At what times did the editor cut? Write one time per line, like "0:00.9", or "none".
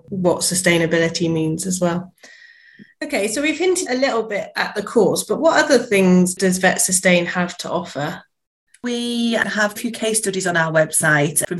0:03.9
0:09.8